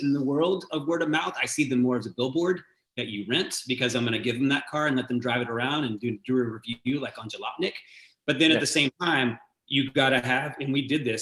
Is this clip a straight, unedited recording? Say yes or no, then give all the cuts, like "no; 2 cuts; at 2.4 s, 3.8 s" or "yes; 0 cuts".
yes; 0 cuts